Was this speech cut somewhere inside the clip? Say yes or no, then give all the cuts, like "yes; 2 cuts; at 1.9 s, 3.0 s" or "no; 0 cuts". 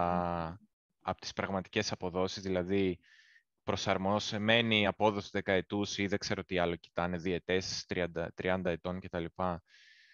no; 0 cuts